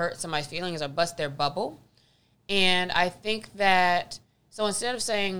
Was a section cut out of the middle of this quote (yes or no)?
no